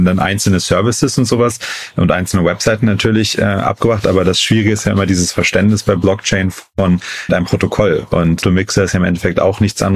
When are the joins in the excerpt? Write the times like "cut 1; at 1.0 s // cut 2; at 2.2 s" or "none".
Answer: cut 1; at 7.3 s // cut 2; at 8.4 s